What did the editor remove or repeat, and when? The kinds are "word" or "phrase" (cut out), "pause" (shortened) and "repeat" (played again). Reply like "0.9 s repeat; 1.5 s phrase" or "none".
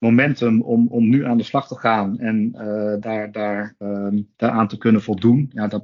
3.0 s word; 4.3 s pause